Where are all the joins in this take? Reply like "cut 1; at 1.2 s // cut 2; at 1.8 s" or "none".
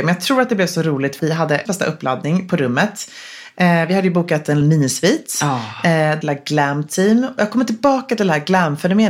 cut 1; at 1.2 s // cut 2; at 1.7 s // cut 3; at 4.6 s // cut 4; at 6.2 s

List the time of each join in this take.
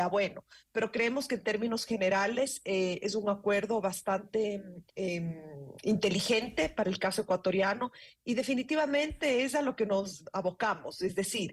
cut 1; at 4.9 s

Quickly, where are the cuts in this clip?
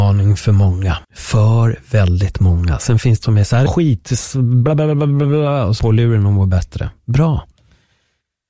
cut 1; at 1.0 s // cut 2; at 3.2 s // cut 3; at 3.7 s // cut 4; at 5.8 s

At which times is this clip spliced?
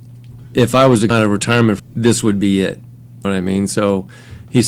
cut 1; at 1.1 s // cut 2; at 1.8 s // cut 3; at 3.2 s

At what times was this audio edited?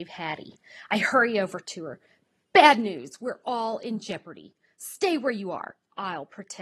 none

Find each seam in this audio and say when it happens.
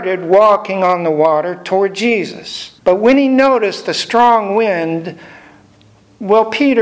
cut 1; at 2.8 s

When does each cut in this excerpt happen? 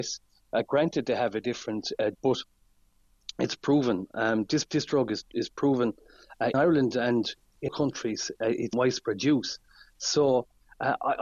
cut 1; at 2.1 s // cut 2; at 4.7 s // cut 3; at 6.5 s // cut 4; at 7.7 s // cut 5; at 8.7 s

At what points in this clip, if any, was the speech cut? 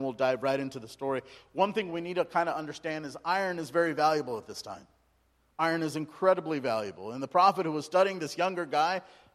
none

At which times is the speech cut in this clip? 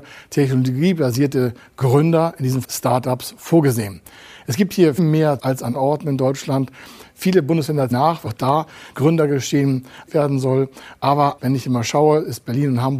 cut 1; at 2.6 s // cut 2; at 5.0 s // cut 3; at 5.4 s // cut 4; at 5.7 s // cut 5; at 7.9 s // cut 6; at 8.3 s // cut 7; at 8.9 s // cut 8; at 10.1 s // cut 9; at 11.4 s

